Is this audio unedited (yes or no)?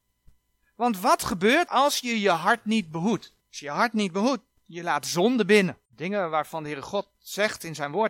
no